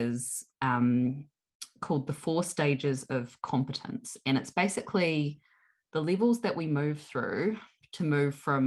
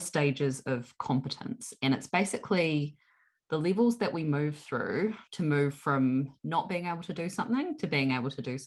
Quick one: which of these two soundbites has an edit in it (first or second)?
second